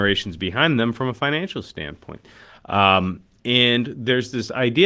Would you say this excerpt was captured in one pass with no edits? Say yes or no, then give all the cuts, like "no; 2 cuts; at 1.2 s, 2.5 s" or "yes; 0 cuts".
yes; 0 cuts